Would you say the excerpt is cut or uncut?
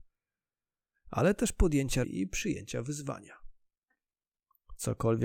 cut